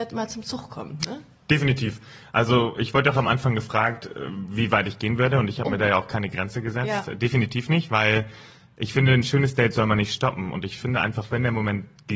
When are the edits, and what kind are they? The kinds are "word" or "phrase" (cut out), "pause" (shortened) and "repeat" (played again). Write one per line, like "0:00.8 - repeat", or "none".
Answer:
none